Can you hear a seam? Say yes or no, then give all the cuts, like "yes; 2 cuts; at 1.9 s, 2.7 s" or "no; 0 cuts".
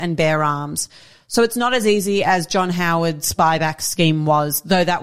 no; 0 cuts